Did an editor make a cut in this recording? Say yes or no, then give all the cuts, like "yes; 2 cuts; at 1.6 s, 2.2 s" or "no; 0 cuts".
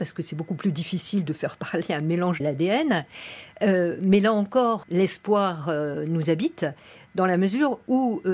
yes; 2 cuts; at 2.4 s, 4.8 s